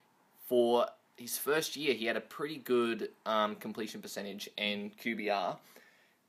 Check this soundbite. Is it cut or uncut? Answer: uncut